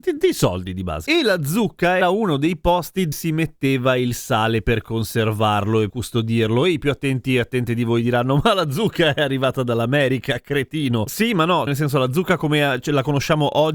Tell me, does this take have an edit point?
yes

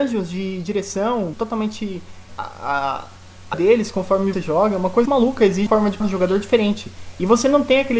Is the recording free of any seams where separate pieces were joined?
no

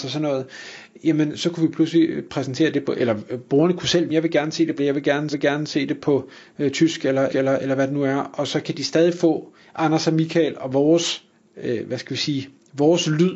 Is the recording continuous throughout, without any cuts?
no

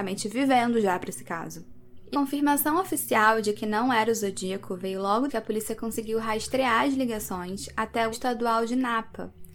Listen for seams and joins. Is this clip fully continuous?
no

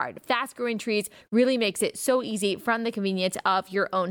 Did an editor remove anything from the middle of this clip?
no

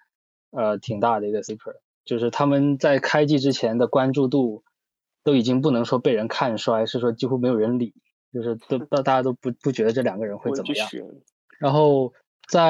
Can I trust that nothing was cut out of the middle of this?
yes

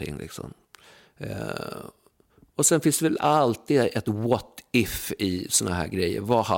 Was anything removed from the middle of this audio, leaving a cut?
no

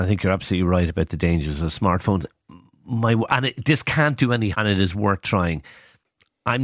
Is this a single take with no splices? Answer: no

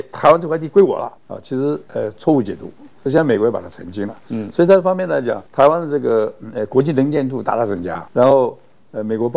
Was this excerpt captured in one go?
no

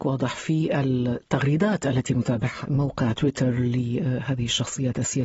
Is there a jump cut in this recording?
yes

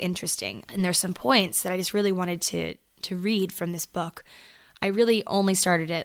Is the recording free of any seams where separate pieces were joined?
yes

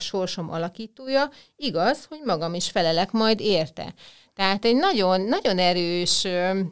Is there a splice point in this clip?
no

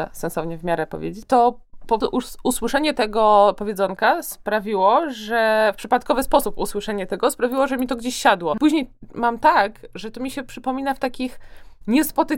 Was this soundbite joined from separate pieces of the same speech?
no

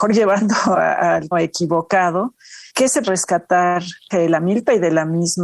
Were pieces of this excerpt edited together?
yes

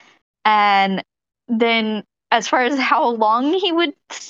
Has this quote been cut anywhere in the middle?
no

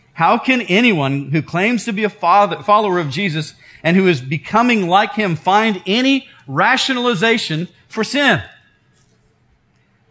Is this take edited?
no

